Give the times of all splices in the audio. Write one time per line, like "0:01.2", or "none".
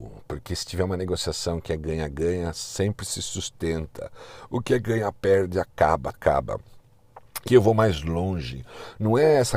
0:06.1
0:07.5